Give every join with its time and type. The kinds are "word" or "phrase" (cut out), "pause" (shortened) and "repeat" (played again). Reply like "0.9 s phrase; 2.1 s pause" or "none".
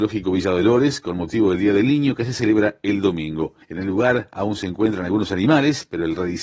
3.6 s pause